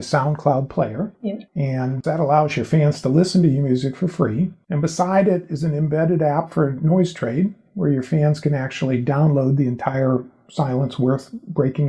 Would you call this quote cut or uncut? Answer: uncut